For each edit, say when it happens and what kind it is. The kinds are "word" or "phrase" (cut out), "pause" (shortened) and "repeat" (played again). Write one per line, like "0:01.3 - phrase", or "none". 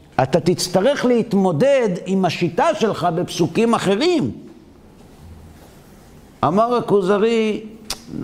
none